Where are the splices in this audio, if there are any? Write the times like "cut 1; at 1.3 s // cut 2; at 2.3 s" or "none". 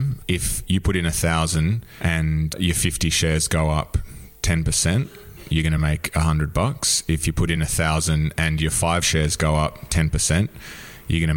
none